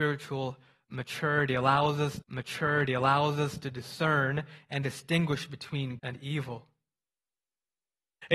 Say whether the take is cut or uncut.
cut